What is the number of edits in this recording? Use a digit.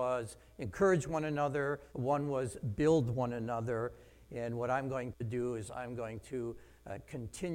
1